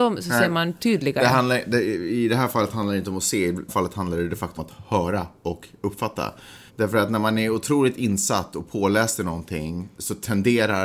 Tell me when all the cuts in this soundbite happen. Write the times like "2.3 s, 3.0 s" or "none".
3.7 s, 4.6 s, 6.7 s